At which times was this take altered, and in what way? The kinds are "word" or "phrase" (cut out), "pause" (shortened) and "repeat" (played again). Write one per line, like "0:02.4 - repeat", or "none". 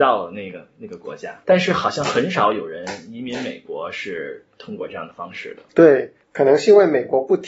0:06.2 - pause